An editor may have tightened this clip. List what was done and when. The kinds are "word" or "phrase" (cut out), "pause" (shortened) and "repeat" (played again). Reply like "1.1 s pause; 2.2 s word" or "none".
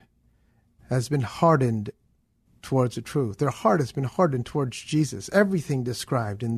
none